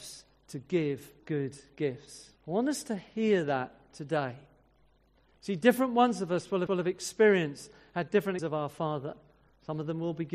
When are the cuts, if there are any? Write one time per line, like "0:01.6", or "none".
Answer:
0:01.2
0:02.4
0:06.7
0:08.4